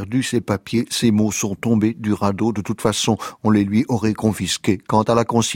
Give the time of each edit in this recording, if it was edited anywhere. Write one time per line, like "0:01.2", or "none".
none